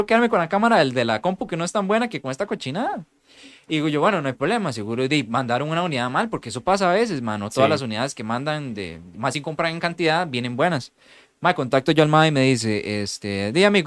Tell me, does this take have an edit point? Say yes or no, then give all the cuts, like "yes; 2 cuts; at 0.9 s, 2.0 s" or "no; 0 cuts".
no; 0 cuts